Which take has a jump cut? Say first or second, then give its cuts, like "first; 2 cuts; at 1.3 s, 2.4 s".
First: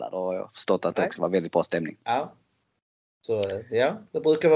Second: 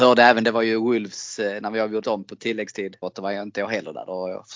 second; 2 cuts; at 2.0 s, 3.0 s